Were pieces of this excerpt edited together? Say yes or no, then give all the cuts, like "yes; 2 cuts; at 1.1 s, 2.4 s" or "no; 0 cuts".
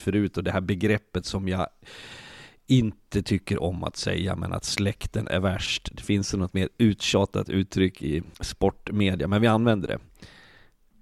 yes; 1 cut; at 8.3 s